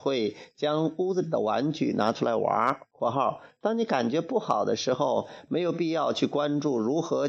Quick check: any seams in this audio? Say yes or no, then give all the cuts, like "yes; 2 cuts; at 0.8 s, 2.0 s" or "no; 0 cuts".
yes; 1 cut; at 2.9 s